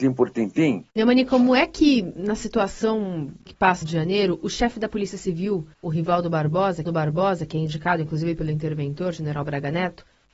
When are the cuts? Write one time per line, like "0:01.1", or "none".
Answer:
0:00.9
0:03.5
0:03.8
0:05.7
0:06.9